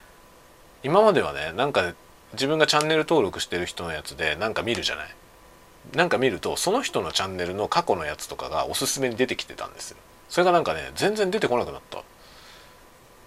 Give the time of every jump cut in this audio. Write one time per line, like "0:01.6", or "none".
0:10.1